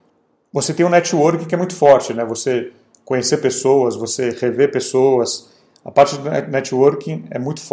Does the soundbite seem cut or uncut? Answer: uncut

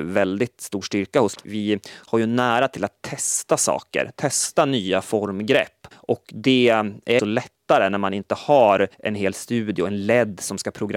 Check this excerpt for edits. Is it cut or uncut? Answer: cut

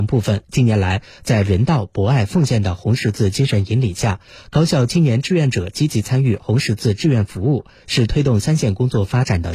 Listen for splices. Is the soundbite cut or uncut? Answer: uncut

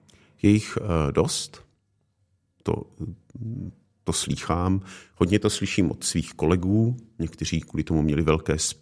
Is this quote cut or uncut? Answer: uncut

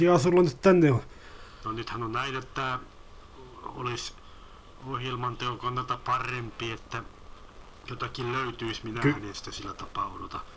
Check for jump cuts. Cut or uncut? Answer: uncut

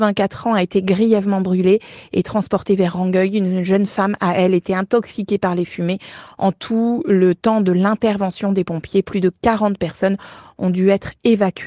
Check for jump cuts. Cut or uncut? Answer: uncut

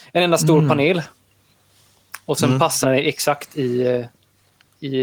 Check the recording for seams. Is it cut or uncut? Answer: cut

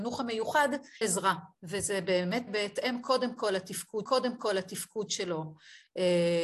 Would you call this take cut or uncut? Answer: cut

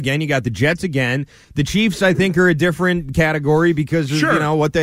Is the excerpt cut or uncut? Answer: uncut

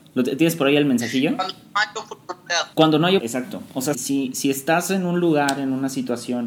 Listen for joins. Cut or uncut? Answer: cut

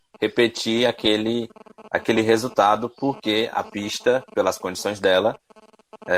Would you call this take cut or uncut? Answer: uncut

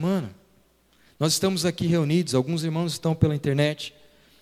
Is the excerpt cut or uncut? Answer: uncut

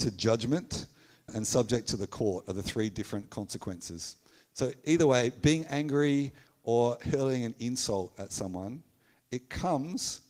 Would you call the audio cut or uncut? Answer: cut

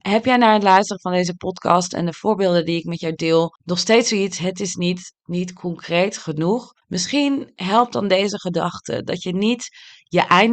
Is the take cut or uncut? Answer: cut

